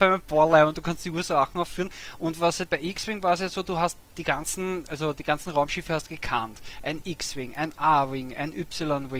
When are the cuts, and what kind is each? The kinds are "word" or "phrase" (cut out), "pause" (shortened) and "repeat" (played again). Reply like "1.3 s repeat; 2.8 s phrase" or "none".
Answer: 2.7 s word; 4.8 s word